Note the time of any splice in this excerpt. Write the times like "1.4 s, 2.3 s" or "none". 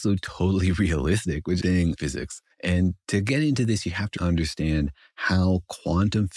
1.6 s, 2.0 s, 2.5 s, 4.2 s